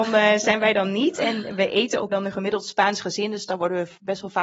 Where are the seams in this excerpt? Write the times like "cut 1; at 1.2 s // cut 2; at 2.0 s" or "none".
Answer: cut 1; at 2.1 s